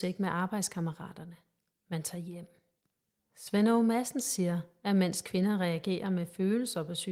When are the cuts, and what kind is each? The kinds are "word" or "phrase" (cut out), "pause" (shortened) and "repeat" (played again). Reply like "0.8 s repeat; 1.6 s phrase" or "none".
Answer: none

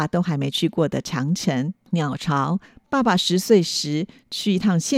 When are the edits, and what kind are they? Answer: none

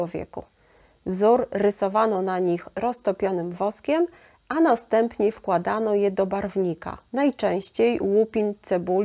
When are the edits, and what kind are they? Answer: 7.1 s pause

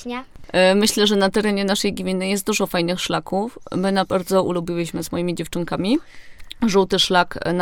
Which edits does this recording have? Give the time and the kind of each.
4.1 s word

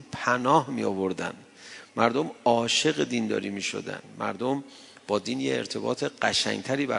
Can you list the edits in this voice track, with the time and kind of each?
none

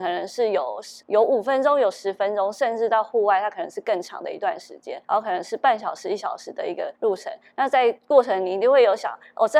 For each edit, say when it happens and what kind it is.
1.0 s pause; 5.0 s pause; 7.0 s pause; 8.0 s pause

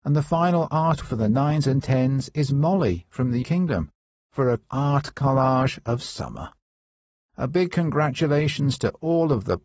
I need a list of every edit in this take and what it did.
1.0 s word; 3.4 s word; 4.6 s word

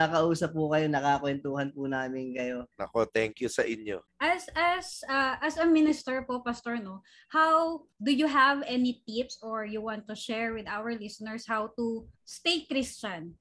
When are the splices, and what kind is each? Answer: 2.7 s pause; 4.1 s pause; 7.9 s pause; 12.1 s pause

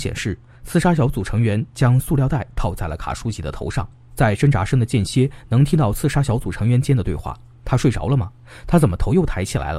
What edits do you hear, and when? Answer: none

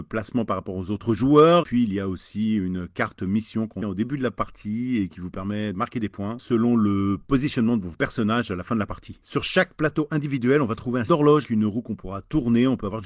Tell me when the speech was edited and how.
1.6 s word; 3.8 s word; 5.7 s word; 11.1 s word; 11.4 s word

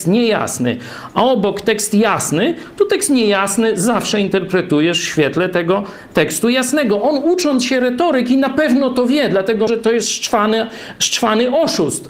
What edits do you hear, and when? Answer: 9.7 s word

